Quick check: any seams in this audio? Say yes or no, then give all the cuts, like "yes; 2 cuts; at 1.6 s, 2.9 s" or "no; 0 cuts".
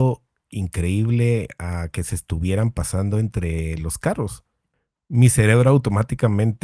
no; 0 cuts